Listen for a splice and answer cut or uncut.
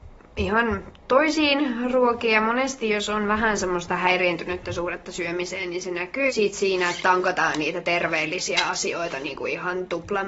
cut